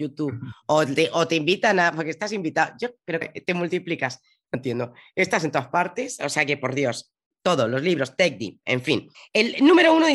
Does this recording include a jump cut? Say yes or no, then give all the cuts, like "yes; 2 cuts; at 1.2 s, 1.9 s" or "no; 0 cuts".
yes; 3 cuts; at 3.2 s, 4.5 s, 9.1 s